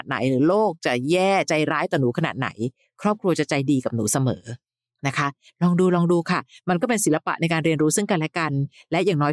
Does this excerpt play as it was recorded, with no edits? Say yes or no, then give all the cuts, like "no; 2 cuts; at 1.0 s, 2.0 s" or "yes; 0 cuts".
yes; 0 cuts